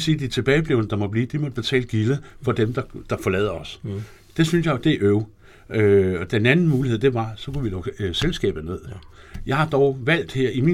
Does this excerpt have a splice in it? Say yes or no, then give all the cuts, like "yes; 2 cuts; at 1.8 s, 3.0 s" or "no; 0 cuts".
no; 0 cuts